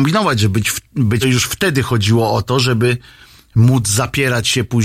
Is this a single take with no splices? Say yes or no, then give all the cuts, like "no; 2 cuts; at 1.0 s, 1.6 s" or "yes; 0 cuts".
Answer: no; 1 cut; at 1.2 s